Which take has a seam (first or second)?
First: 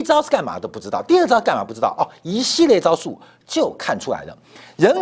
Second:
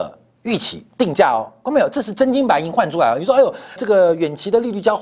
second